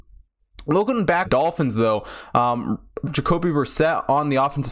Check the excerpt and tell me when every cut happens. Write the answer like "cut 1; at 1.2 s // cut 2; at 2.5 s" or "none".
cut 1; at 1.2 s // cut 2; at 3.1 s